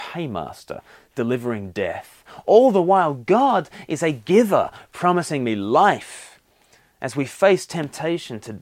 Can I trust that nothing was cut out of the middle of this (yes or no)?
yes